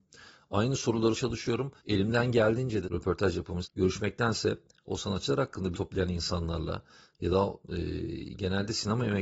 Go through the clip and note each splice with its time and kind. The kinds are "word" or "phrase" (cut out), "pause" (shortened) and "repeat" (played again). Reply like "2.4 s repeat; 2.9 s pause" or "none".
1.2 s word; 1.8 s pause; 2.8 s phrase; 3.6 s word; 5.7 s word